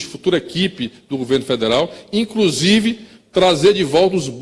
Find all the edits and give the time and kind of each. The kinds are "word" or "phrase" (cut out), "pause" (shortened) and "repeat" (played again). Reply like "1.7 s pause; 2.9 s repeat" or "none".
none